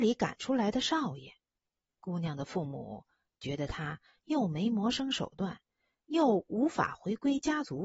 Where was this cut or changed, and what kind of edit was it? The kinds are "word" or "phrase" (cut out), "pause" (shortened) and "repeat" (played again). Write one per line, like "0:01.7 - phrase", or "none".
none